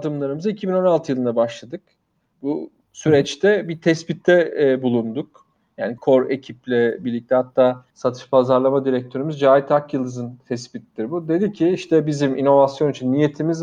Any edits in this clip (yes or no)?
yes